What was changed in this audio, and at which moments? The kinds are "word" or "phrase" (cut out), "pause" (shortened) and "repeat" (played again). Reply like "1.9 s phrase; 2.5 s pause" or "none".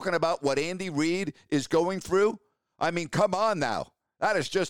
none